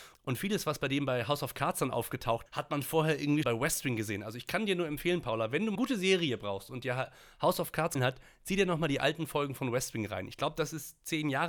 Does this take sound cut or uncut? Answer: cut